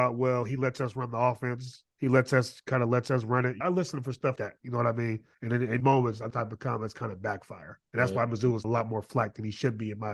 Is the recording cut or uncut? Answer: cut